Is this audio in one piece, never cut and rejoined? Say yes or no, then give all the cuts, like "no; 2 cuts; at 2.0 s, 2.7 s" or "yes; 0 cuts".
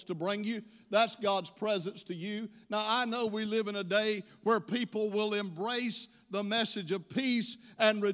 yes; 0 cuts